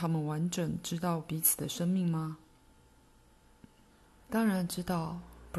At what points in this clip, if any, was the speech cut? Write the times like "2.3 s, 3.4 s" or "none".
3.9 s